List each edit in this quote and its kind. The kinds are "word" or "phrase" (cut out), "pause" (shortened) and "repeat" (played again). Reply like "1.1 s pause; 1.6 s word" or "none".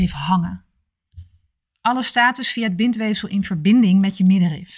none